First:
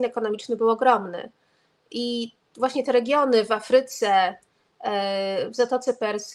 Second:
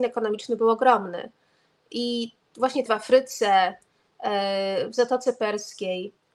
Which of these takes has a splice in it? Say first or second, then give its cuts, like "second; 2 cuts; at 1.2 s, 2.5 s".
second; 1 cut; at 2.9 s